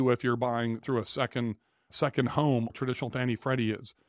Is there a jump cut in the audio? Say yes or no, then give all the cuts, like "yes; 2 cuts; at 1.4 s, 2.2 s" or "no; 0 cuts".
yes; 1 cut; at 2.7 s